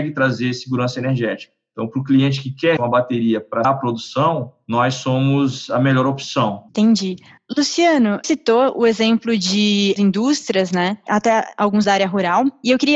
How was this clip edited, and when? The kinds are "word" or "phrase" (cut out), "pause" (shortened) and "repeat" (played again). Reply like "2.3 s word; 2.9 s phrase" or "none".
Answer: 2.8 s word; 3.6 s word; 6.7 s pause; 8.2 s word; 10.0 s word; 11.8 s word

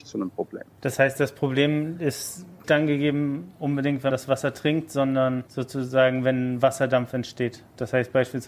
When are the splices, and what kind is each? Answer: 2.6 s word; 4.1 s word

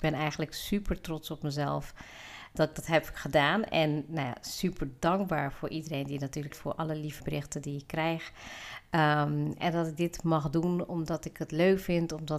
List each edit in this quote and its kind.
2.5 s word; 6.5 s word; 7.2 s word

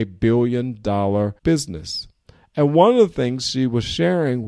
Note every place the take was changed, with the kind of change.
1.4 s pause

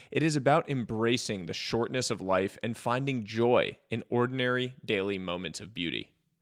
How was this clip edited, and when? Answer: none

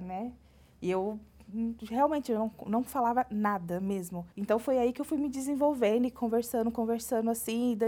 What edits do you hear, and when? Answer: 4.3 s pause

